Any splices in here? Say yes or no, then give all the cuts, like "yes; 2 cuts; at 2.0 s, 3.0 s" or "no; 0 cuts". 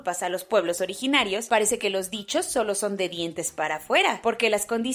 no; 0 cuts